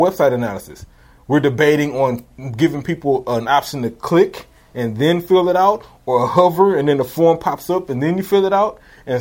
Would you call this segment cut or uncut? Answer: uncut